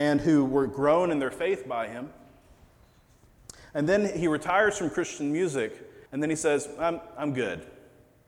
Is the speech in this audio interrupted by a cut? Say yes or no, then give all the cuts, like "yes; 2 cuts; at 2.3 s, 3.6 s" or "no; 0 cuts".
yes; 1 cut; at 6.1 s